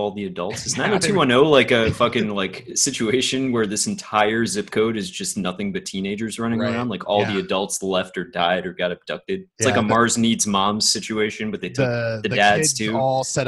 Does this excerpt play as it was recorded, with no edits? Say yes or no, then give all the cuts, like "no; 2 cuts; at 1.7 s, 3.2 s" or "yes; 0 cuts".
no; 1 cut; at 9.5 s